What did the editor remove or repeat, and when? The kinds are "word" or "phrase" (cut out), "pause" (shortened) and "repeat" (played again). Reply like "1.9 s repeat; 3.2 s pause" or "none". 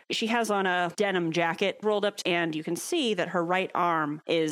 1.8 s phrase; 2.2 s phrase